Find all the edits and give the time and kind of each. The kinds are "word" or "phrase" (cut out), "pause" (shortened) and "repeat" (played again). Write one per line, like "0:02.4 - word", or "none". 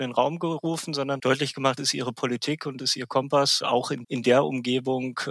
0:01.2 - word
0:01.8 - word
0:02.8 - word
0:03.6 - word
0:04.0 - word